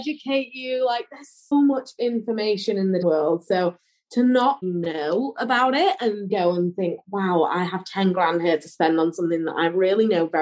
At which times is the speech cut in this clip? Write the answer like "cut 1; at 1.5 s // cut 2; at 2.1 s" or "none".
cut 1; at 1.5 s // cut 2; at 3.0 s // cut 3; at 4.6 s // cut 4; at 6.3 s